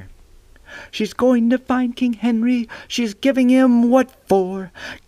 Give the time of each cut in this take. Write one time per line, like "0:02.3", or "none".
none